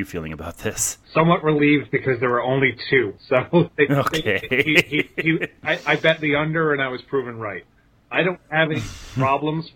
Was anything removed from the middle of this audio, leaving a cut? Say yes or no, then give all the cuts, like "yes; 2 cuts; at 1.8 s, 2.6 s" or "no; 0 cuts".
no; 0 cuts